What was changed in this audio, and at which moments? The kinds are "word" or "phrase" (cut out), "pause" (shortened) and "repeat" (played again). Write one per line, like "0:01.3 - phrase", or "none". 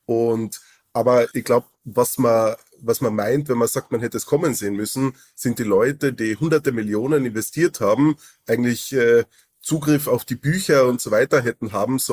0:01.3 - word